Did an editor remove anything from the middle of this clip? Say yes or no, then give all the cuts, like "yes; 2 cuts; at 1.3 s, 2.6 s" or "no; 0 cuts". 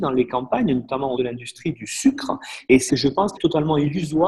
yes; 3 cuts; at 1.2 s, 2.9 s, 3.4 s